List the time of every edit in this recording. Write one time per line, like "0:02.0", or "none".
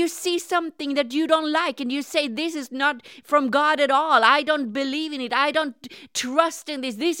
none